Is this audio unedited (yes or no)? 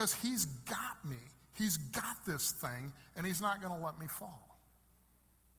yes